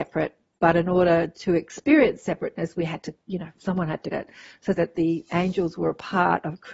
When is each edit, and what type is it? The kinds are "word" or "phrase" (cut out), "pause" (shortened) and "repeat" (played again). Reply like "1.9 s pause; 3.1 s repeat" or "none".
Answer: 3.2 s pause; 4.1 s word; 4.8 s word